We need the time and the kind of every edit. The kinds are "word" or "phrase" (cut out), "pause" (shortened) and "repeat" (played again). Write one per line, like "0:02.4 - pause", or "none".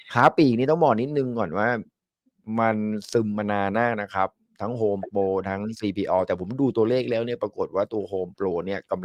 none